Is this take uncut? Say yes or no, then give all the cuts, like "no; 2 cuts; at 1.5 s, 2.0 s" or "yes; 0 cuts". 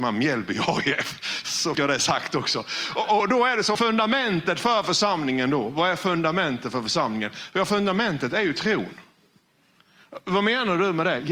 no; 3 cuts; at 1.7 s, 3.2 s, 3.7 s